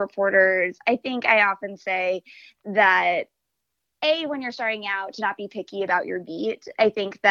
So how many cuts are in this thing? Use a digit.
0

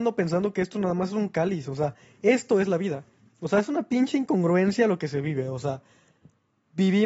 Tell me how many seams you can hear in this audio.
0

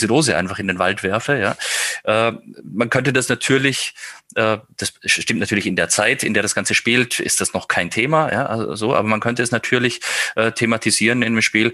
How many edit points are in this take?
0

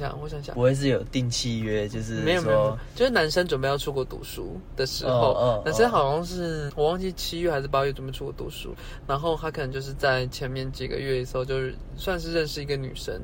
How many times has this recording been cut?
1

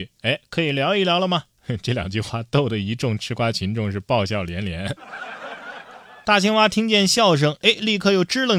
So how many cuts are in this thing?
0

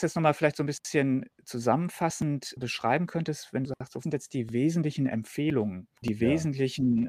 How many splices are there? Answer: 4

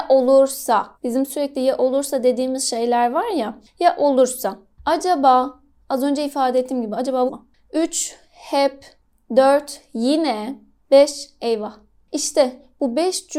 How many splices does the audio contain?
2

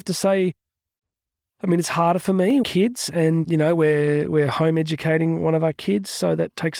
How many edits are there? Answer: 2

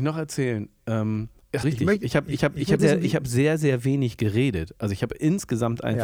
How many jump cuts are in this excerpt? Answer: 3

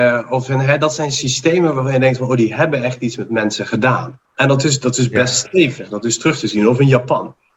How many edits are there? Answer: 1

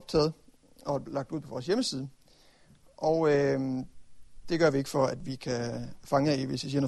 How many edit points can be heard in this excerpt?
0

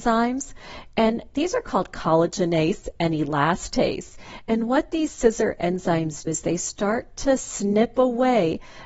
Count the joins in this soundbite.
1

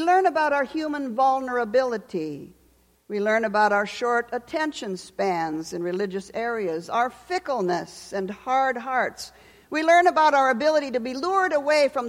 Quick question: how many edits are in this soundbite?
0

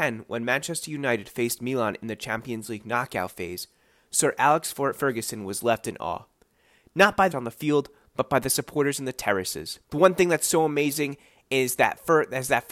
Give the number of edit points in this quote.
2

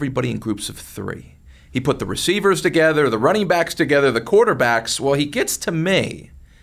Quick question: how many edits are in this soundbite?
0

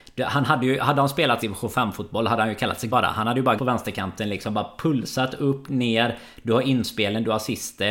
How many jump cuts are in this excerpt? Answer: 3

